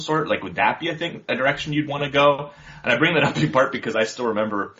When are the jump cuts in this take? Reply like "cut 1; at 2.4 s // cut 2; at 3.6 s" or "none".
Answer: none